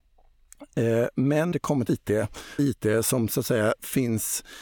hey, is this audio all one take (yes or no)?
no